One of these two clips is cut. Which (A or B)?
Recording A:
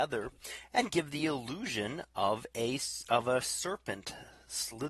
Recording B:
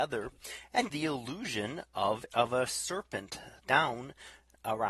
B